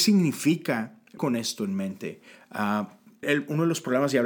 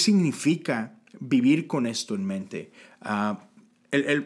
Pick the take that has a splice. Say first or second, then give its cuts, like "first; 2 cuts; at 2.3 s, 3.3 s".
first; 2 cuts; at 1.2 s, 3.2 s